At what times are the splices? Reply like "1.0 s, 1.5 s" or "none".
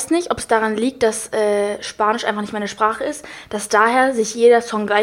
none